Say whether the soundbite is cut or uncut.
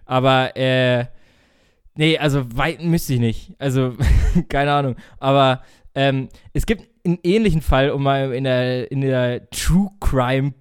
uncut